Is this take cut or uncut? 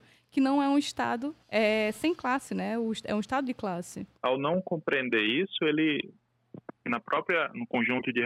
cut